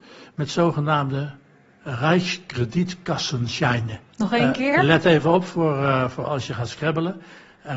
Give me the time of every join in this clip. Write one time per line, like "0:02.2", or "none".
0:04.1